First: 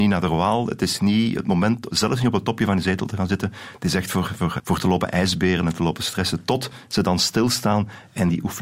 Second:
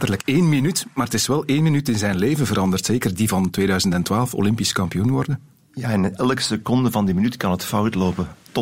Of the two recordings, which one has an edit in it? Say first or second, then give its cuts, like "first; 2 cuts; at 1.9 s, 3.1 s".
first; 1 cut; at 4.6 s